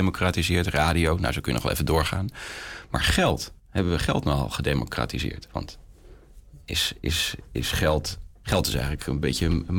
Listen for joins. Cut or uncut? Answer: cut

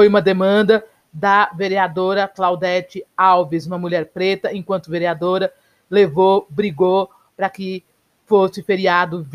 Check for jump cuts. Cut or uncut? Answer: uncut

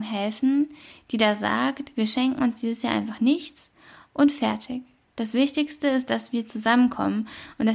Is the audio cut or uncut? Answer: uncut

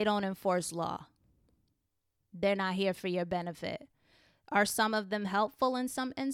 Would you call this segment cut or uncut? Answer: uncut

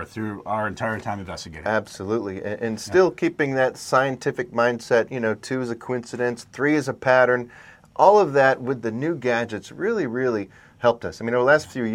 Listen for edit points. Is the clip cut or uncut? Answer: uncut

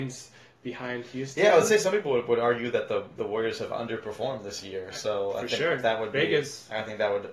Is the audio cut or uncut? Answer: uncut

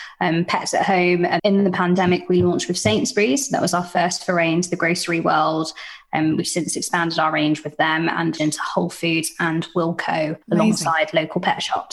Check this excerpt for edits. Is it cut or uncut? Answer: cut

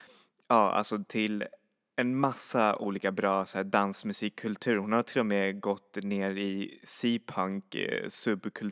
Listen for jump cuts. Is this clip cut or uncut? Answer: uncut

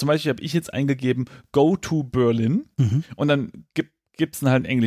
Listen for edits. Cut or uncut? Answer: uncut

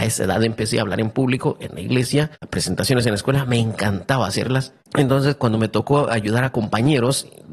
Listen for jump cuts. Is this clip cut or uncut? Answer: cut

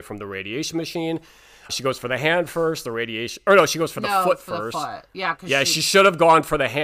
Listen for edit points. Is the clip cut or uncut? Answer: cut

